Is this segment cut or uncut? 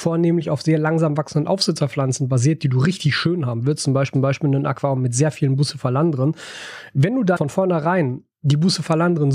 cut